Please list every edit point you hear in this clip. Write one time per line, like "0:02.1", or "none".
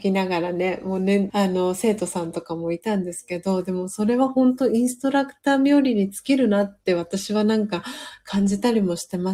0:01.3